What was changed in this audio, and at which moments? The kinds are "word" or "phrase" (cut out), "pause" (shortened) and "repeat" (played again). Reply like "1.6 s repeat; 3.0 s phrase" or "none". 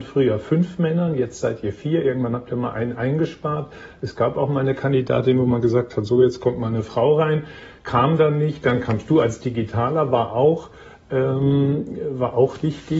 none